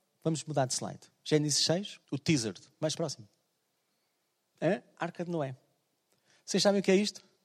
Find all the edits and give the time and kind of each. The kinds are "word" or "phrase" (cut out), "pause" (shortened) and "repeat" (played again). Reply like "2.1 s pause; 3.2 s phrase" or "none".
2.0 s pause; 3.0 s word